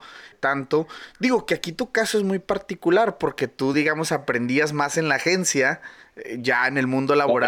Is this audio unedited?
yes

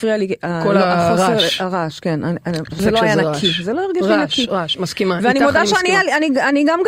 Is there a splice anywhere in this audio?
yes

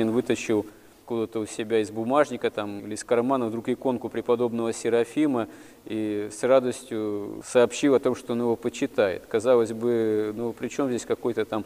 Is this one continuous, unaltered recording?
yes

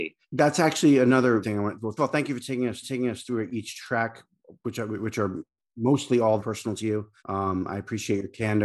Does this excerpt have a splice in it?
yes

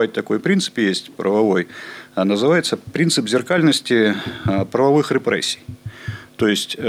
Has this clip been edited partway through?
no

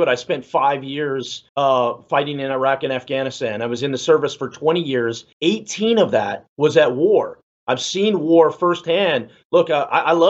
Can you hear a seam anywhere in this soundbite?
yes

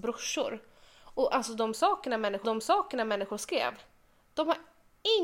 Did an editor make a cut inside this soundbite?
yes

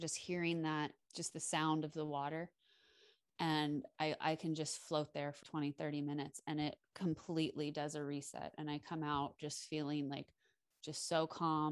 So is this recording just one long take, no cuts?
no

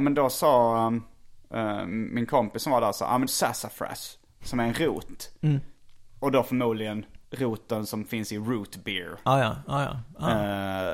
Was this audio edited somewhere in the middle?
yes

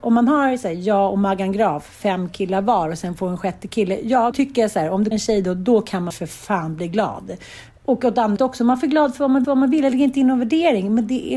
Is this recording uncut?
no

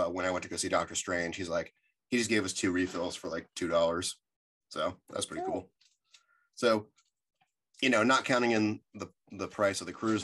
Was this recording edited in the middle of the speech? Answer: no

